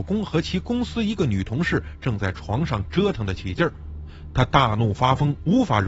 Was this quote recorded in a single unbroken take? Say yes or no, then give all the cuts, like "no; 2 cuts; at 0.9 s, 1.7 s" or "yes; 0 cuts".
yes; 0 cuts